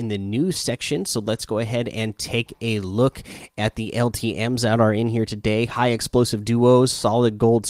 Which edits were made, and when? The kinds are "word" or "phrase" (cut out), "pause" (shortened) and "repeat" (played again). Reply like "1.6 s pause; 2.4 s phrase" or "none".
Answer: none